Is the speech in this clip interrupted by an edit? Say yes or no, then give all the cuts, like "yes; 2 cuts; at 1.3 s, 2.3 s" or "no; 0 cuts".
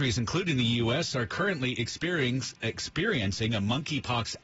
no; 0 cuts